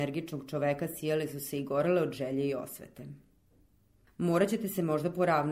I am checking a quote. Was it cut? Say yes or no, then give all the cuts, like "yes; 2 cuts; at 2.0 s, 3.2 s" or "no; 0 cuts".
no; 0 cuts